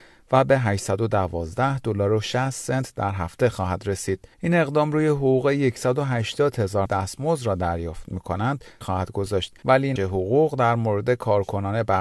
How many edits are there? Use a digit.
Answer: 5